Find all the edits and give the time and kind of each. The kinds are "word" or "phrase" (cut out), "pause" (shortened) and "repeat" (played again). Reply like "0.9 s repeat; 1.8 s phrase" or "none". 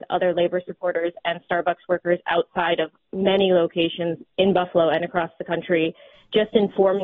none